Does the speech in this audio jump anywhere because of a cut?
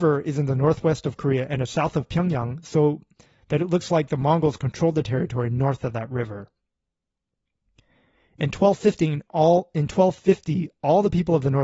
no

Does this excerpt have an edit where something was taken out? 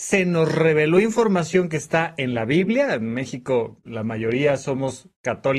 no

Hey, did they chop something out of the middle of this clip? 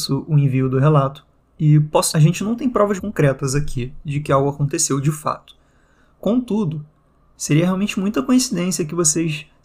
yes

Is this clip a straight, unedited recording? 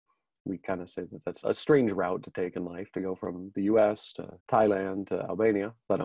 no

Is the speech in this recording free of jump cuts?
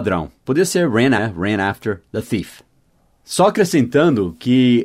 no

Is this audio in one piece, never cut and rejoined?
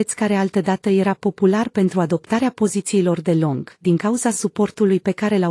yes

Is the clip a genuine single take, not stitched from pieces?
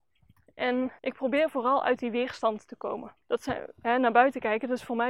no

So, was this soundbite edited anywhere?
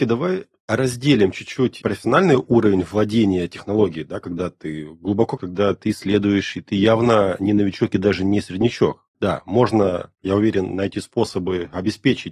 yes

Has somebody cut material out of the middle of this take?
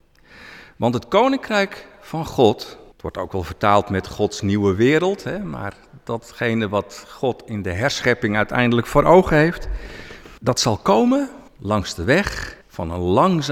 yes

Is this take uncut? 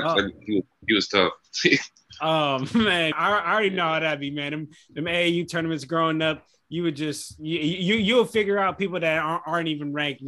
no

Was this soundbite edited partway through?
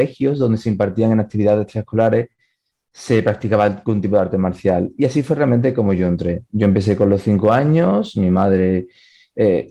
no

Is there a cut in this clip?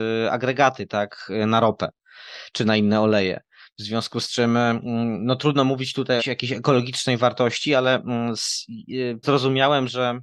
yes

